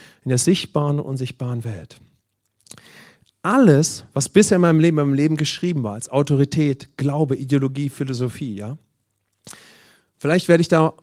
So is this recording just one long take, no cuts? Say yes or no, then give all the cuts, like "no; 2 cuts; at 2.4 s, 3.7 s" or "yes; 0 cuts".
yes; 0 cuts